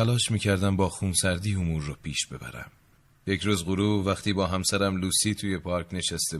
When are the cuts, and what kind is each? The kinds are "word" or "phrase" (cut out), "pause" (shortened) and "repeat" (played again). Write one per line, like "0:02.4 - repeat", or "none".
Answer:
none